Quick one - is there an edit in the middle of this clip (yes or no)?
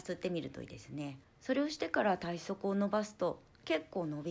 yes